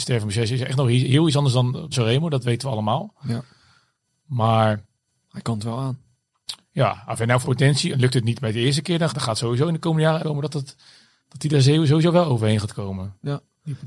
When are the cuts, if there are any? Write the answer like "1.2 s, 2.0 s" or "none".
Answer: 1.9 s, 7.4 s, 7.9 s, 9.1 s, 10.2 s